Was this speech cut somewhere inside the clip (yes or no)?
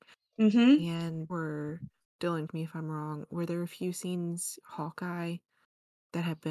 yes